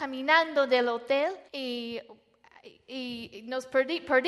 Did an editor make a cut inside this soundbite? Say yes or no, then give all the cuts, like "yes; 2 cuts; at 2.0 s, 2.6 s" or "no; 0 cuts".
yes; 1 cut; at 1.5 s